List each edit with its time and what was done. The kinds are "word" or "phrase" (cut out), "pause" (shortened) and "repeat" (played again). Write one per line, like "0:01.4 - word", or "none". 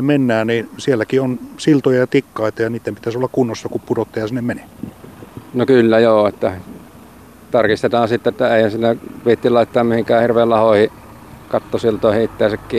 none